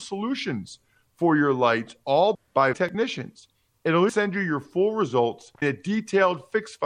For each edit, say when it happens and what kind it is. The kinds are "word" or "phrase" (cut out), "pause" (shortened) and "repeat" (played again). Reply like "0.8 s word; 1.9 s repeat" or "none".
2.3 s word; 2.7 s word; 4.1 s word; 5.6 s word